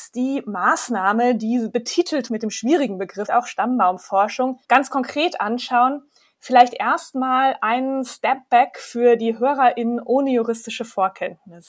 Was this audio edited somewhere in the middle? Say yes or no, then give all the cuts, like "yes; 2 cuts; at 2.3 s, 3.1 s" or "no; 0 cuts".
yes; 3 cuts; at 2.3 s, 3.3 s, 4.6 s